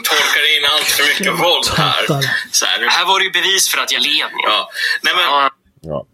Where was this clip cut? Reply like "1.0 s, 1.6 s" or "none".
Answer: 4.0 s